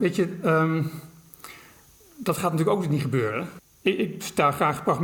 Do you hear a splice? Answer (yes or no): no